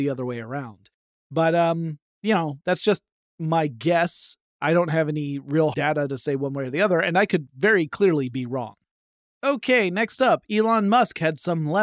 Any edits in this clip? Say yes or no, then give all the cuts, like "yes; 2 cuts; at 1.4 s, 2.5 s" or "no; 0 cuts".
yes; 1 cut; at 5.7 s